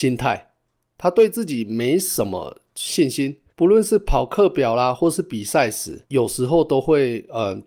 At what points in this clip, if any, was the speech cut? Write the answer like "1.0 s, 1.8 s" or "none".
3.5 s, 6.0 s